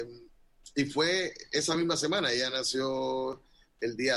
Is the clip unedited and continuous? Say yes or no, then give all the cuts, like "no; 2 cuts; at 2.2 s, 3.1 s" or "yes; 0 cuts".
yes; 0 cuts